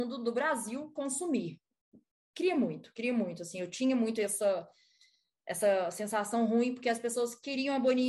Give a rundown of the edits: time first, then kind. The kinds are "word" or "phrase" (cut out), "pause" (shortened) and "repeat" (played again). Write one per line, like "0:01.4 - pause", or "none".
none